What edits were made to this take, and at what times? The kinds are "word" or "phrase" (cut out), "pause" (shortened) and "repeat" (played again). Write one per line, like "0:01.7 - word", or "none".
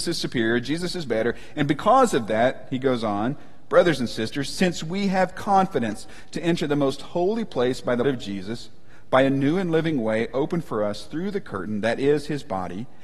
0:08.0 - word